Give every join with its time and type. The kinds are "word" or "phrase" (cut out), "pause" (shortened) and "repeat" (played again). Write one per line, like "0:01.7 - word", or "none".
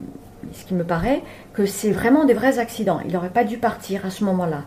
none